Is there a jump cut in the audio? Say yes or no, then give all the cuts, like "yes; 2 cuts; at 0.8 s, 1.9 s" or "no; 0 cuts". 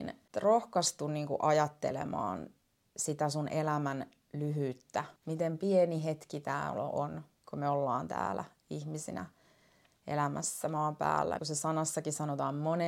yes; 2 cuts; at 5.2 s, 11.4 s